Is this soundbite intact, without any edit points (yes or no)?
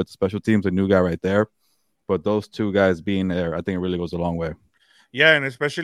yes